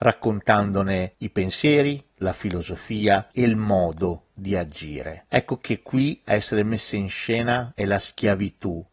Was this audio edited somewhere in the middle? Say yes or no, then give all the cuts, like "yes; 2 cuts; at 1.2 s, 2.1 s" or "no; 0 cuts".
no; 0 cuts